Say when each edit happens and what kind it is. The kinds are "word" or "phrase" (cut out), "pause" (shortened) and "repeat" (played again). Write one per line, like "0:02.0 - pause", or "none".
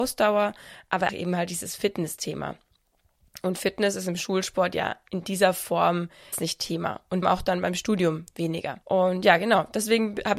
0:01.1 - word
0:06.3 - word
0:07.2 - word
0:08.8 - pause